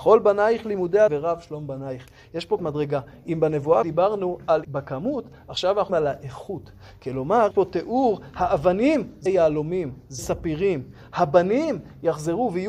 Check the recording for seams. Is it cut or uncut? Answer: cut